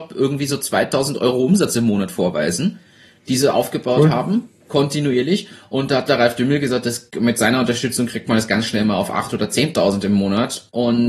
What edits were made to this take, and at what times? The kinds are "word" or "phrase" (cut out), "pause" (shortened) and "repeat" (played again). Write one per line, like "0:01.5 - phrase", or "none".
none